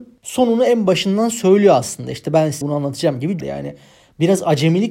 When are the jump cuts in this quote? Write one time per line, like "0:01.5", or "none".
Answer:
0:02.6
0:03.4